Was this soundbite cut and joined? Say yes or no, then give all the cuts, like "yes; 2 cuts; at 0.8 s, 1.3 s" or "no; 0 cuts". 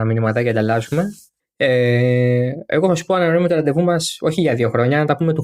yes; 1 cut; at 1.4 s